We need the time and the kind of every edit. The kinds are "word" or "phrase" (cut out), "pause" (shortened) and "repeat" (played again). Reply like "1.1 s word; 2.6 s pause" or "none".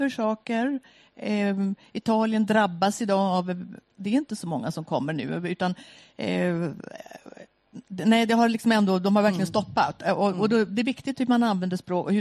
4.0 s word